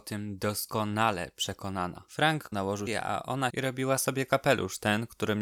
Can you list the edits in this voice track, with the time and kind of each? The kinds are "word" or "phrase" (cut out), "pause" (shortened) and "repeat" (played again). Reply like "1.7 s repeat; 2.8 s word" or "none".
2.5 s word; 2.9 s word; 3.5 s phrase